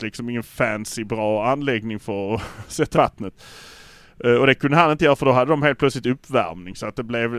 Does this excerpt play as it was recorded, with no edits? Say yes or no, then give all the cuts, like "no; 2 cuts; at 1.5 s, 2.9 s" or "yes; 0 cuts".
no; 1 cut; at 2.9 s